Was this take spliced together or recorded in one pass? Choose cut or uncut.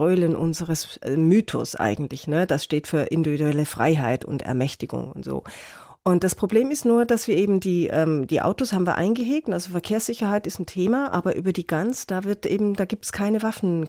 uncut